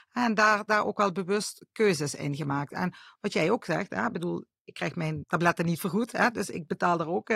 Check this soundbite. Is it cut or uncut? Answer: uncut